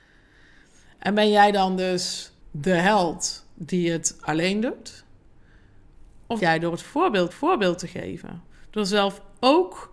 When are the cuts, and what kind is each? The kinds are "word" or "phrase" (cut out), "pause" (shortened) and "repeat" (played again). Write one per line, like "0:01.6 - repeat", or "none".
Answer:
0:02.4 - pause
0:06.4 - word
0:07.3 - repeat